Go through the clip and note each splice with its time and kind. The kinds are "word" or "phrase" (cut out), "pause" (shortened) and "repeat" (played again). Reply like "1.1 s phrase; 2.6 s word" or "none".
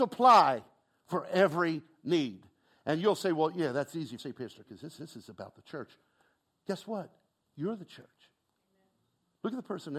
4.2 s phrase; 4.6 s word; 5.0 s repeat